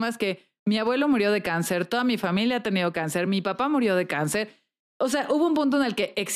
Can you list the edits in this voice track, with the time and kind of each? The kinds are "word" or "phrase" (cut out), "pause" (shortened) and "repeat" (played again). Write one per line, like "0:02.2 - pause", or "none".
none